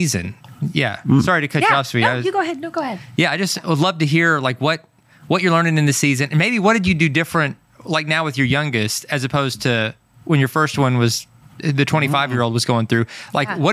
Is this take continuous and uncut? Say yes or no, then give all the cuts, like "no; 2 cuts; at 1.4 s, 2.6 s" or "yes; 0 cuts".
yes; 0 cuts